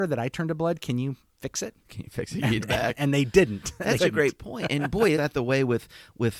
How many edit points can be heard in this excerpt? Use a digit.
3